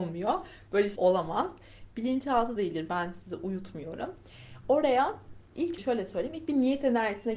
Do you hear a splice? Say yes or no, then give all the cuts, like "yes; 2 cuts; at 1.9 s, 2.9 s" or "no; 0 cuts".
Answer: yes; 3 cuts; at 1.0 s, 2.6 s, 5.8 s